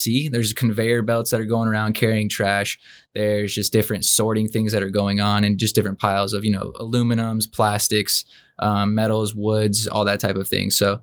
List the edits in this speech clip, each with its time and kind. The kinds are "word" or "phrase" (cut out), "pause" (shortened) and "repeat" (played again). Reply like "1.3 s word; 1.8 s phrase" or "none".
none